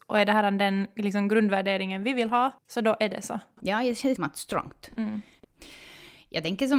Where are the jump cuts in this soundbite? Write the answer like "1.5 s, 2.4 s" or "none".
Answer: 2.6 s, 4.2 s